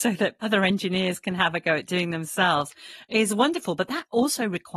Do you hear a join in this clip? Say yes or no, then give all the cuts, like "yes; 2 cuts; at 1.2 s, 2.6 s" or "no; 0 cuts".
no; 0 cuts